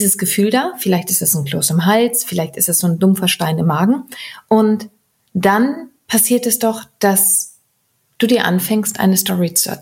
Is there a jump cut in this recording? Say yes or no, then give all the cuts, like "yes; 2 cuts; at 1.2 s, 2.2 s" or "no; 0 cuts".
no; 0 cuts